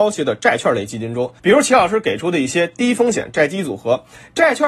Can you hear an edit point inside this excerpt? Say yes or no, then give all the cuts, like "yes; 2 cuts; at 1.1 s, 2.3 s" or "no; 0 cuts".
yes; 1 cut; at 1.4 s